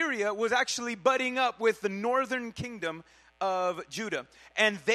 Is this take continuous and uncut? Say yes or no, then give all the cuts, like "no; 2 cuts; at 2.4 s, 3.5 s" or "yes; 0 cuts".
yes; 0 cuts